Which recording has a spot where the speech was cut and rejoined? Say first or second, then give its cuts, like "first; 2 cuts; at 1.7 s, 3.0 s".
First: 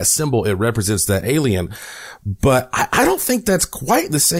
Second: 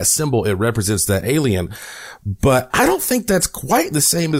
second; 1 cut; at 2.7 s